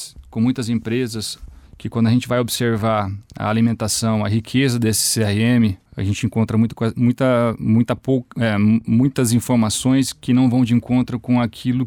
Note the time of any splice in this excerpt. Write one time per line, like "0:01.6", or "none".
0:01.7
0:05.9